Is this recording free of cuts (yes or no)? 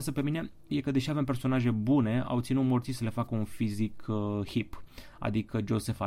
yes